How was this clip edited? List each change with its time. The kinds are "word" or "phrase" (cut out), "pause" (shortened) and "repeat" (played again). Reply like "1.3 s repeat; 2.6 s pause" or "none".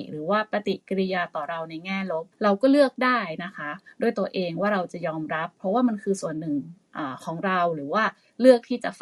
2.3 s pause